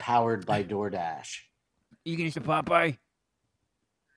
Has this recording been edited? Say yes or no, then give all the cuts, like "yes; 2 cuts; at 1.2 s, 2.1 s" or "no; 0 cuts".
yes; 2 cuts; at 1.9 s, 2.3 s